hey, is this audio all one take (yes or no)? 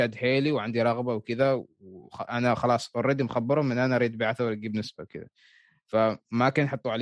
yes